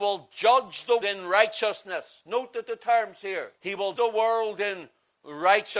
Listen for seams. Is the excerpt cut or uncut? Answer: cut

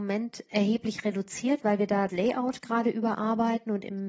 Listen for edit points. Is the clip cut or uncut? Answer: cut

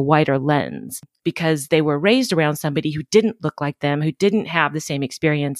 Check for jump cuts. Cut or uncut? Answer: uncut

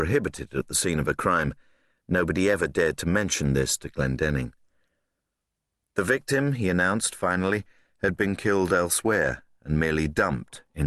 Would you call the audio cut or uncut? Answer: uncut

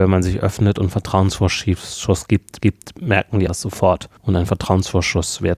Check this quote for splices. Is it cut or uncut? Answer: cut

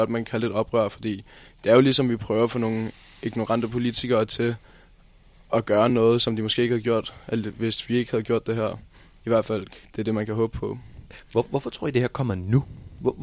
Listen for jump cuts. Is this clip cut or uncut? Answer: uncut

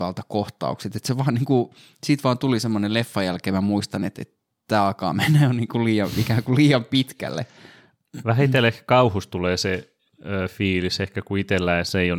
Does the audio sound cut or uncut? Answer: uncut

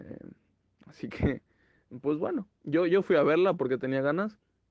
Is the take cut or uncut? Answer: cut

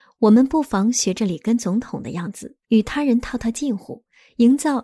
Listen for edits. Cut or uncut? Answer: cut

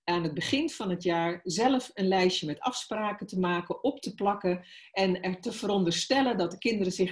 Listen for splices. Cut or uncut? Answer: uncut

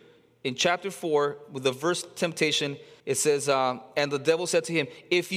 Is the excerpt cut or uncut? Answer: cut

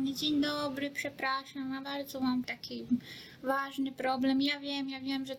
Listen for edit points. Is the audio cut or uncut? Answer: cut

